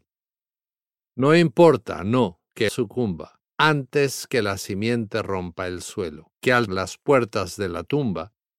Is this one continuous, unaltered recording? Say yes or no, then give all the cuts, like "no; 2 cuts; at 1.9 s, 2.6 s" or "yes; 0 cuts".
no; 4 cuts; at 2.7 s, 3.5 s, 6.4 s, 6.7 s